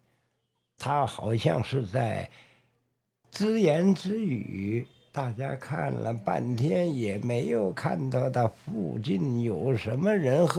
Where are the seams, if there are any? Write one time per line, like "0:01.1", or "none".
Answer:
none